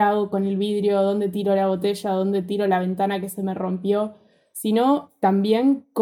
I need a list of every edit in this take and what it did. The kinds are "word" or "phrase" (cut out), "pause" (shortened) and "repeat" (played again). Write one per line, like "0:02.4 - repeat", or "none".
none

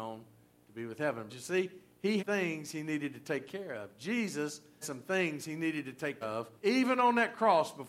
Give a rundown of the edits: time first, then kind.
0:01.3 - word
0:02.2 - phrase
0:04.8 - word
0:06.2 - word
0:06.6 - pause

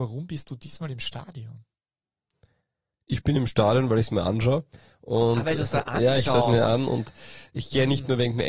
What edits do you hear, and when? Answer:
none

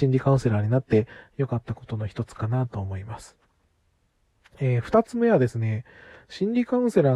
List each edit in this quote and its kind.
none

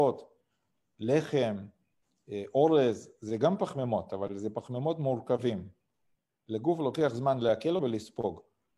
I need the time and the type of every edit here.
0:07.8 - word

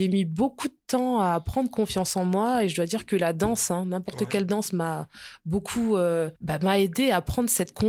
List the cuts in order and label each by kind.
0:06.4 - pause

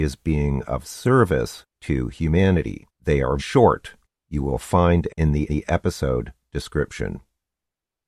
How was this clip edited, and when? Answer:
0:01.7 - pause
0:02.9 - pause
0:03.4 - word
0:04.1 - pause
0:05.1 - phrase
0:05.5 - repeat

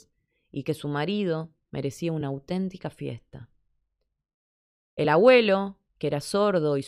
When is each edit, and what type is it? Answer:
none

